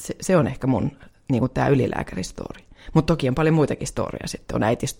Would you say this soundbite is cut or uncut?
uncut